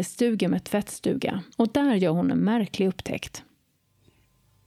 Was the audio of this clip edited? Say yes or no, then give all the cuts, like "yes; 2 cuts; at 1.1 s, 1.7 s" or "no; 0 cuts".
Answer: yes; 1 cut; at 1.5 s